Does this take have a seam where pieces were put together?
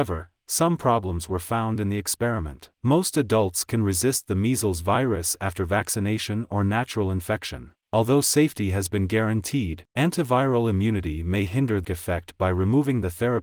yes; 4 cuts; at 2.7 s, 7.8 s, 9.9 s, 11.8 s

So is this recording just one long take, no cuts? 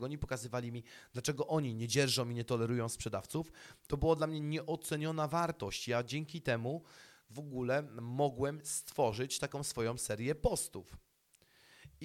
yes; 0 cuts

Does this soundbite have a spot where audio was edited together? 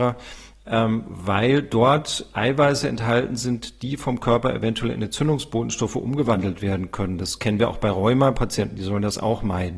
no; 0 cuts

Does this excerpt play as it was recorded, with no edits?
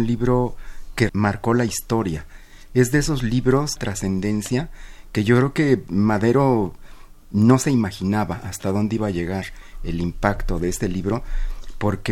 no; 2 cuts; at 1.1 s, 3.8 s

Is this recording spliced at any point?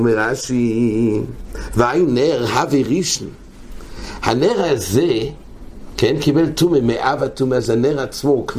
no; 0 cuts

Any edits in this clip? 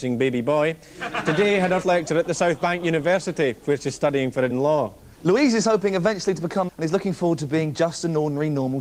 yes; 4 cuts; at 1.8 s, 4.5 s, 5.1 s, 6.7 s

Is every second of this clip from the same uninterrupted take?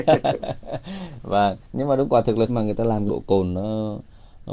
no; 3 cuts; at 1.6 s, 2.5 s, 3.1 s

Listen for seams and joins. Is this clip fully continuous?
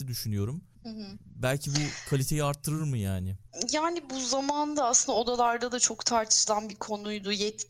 yes; 0 cuts

